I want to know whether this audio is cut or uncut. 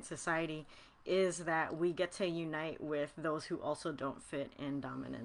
uncut